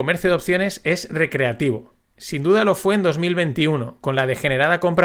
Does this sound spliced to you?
no; 0 cuts

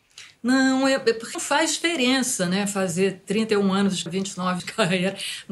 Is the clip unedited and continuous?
no; 3 cuts; at 1.3 s, 4.1 s, 4.6 s

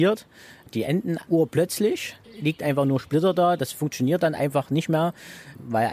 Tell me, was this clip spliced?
yes; 2 cuts; at 1.3 s, 2.2 s

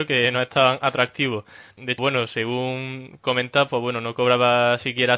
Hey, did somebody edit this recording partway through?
yes; 1 cut; at 2.0 s

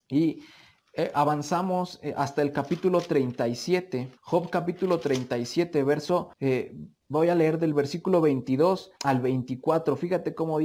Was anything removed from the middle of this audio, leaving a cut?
yes; 3 cuts; at 4.2 s, 6.3 s, 9.0 s

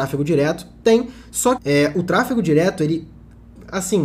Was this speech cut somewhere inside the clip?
yes; 1 cut; at 1.6 s

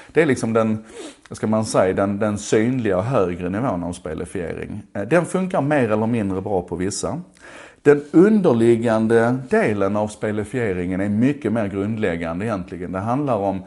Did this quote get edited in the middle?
no; 0 cuts

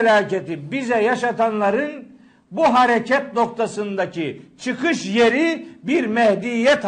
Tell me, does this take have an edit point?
no; 0 cuts

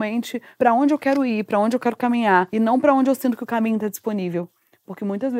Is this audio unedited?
yes; 0 cuts

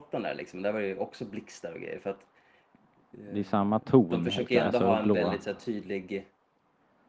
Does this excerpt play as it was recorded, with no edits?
yes; 0 cuts

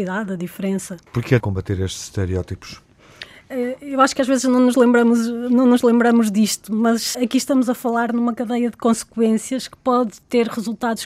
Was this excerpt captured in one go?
no; 3 cuts; at 1.1 s, 1.4 s, 7.1 s

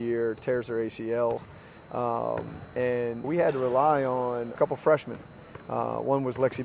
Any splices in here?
yes; 2 cuts; at 3.2 s, 4.5 s

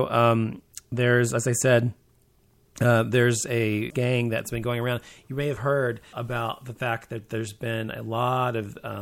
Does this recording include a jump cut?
yes; 2 cuts; at 3.9 s, 6.1 s

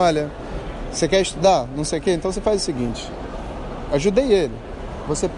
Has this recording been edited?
no; 0 cuts

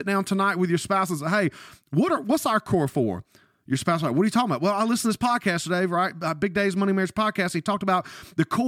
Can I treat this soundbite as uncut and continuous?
yes; 0 cuts

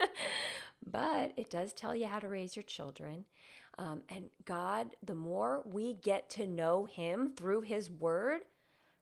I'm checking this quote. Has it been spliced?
no; 0 cuts

